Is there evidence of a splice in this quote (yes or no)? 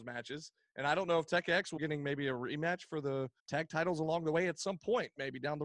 yes